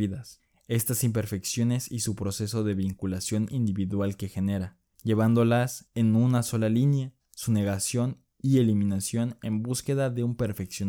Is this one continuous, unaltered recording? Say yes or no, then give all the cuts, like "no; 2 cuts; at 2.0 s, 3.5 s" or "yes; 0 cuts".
yes; 0 cuts